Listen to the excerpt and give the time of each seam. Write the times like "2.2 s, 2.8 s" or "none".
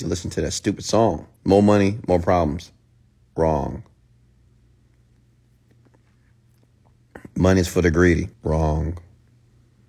1.4 s, 8.3 s